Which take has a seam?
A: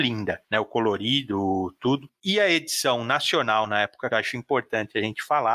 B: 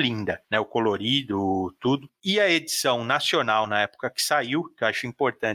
A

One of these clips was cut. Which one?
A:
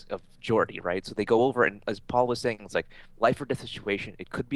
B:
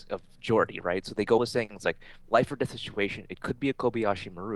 B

